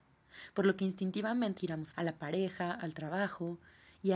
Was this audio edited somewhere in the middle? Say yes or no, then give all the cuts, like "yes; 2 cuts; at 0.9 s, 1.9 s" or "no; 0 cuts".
yes; 2 cuts; at 1.6 s, 1.9 s